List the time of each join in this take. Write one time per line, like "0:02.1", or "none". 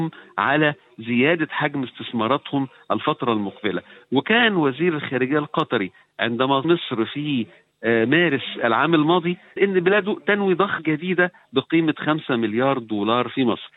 0:06.6
0:09.6
0:10.8